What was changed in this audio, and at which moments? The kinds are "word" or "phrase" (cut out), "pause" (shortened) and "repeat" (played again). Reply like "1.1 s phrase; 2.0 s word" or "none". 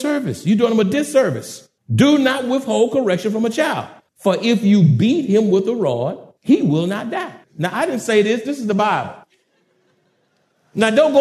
1.8 s pause; 4.1 s pause; 6.4 s pause; 7.4 s pause